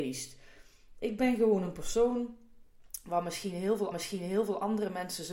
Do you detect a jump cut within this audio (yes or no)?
yes